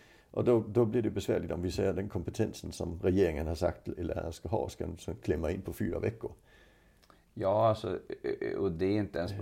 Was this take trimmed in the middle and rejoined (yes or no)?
no